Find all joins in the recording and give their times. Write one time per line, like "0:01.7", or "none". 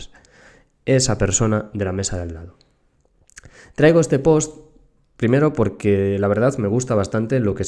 none